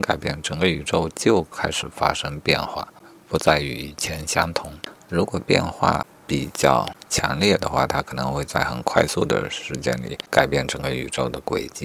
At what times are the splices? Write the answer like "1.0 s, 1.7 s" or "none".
none